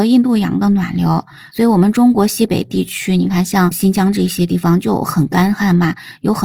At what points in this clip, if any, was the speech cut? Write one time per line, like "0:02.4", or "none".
none